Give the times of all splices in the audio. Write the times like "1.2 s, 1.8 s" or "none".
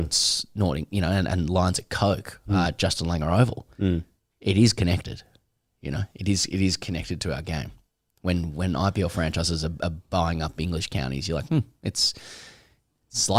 none